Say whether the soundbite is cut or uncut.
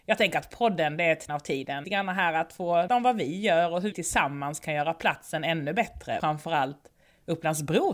cut